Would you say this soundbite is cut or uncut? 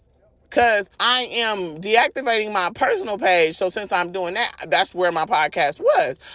cut